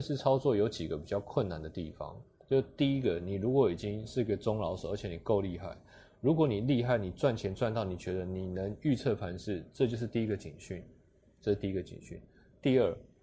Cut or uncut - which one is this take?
uncut